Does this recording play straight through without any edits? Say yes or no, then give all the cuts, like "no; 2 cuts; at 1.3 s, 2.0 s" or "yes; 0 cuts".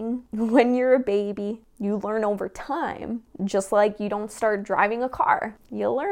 yes; 0 cuts